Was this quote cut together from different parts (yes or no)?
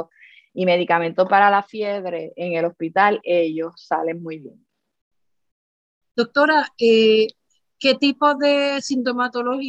no